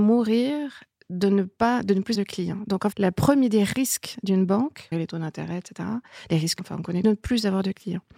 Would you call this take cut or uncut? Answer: cut